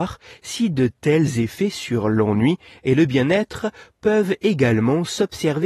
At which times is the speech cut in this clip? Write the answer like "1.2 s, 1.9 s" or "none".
none

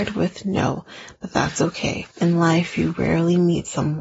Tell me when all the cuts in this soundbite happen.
2.1 s

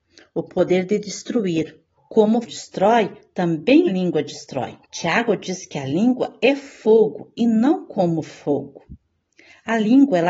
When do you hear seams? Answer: 2.0 s, 2.4 s, 3.9 s, 4.8 s

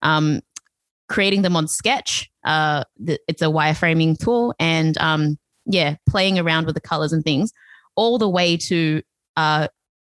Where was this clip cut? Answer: none

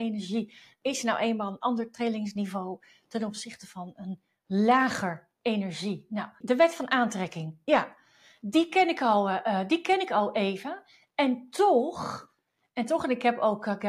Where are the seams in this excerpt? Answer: none

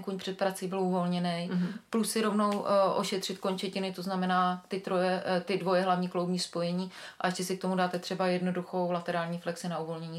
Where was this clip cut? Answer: none

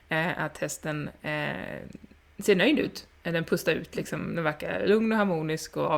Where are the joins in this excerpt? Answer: none

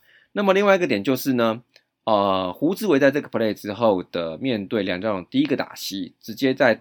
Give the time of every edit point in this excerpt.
none

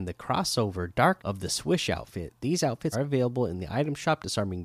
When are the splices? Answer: 1.2 s, 2.9 s

